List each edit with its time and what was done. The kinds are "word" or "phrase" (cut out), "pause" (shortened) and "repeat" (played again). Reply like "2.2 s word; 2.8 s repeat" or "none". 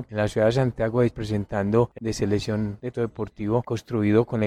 1.1 s word; 2.0 s word; 2.9 s word